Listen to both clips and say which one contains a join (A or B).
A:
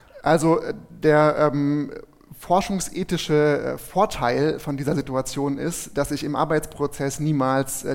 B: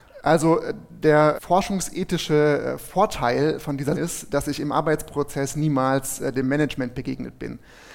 B